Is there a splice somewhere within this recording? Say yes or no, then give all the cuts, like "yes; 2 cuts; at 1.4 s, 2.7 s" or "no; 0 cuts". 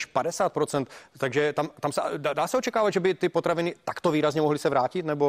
no; 0 cuts